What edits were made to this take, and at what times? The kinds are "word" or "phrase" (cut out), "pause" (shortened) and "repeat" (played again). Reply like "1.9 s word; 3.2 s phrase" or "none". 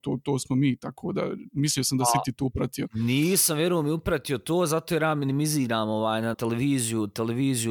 6.3 s phrase